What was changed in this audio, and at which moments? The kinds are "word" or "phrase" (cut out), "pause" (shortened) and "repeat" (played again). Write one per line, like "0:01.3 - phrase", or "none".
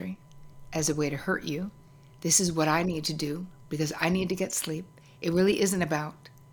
none